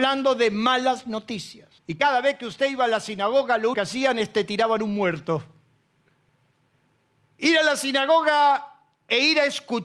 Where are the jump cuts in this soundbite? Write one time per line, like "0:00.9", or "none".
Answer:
0:01.8
0:03.7